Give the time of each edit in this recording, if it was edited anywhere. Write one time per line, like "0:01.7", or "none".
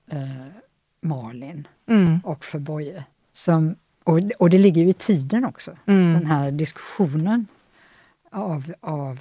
0:03.2